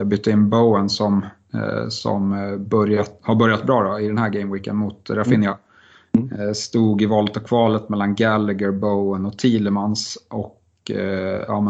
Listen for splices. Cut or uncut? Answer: uncut